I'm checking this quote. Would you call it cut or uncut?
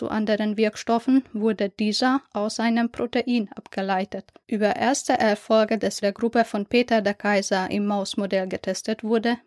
cut